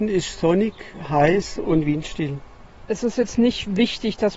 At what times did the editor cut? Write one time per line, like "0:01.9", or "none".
none